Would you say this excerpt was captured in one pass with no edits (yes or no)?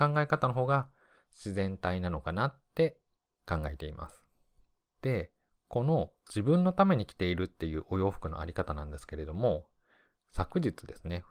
yes